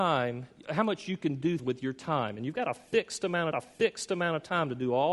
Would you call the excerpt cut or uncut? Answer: cut